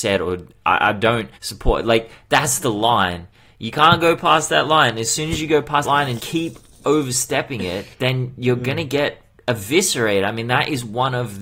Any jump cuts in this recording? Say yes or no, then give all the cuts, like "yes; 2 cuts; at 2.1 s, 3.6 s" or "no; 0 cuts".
yes; 4 cuts; at 1.4 s, 5.8 s, 6.2 s, 7.9 s